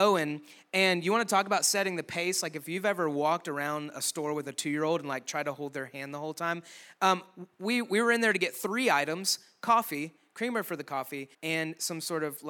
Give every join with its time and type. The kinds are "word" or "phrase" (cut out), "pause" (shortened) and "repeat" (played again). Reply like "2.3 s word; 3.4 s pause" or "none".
11.3 s pause